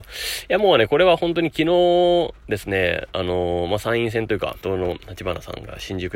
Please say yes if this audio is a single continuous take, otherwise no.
no